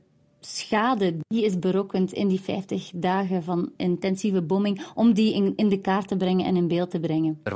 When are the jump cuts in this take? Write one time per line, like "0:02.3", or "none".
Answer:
none